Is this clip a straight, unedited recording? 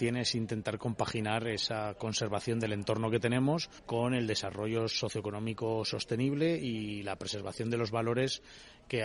no; 1 cut; at 3.8 s

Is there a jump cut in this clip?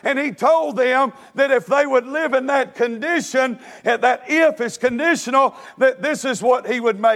no; 0 cuts

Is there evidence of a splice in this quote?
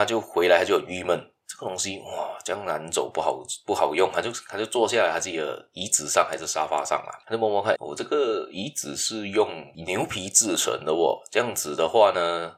yes; 1 cut; at 7.7 s

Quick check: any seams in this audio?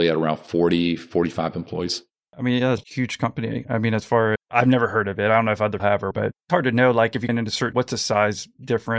yes; 7 cuts; at 2.8 s, 4.4 s, 5.8 s, 6.1 s, 6.5 s, 7.3 s, 7.7 s

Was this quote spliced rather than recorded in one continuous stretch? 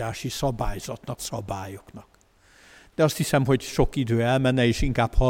yes; 1 cut; at 1.2 s

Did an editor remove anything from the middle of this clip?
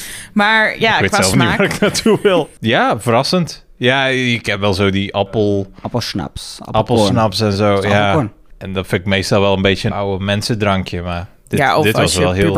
yes; 1 cut; at 9.9 s

